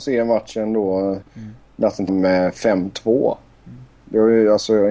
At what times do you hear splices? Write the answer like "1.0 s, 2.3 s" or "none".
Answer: 1.3 s, 2.1 s